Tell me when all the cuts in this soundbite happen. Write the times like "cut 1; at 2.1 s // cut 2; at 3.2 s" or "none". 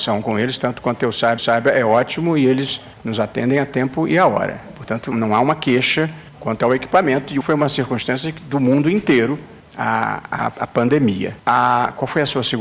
cut 1; at 1.4 s // cut 2; at 2.9 s // cut 3; at 5.1 s // cut 4; at 6.3 s // cut 5; at 7.4 s // cut 6; at 9.6 s // cut 7; at 11.4 s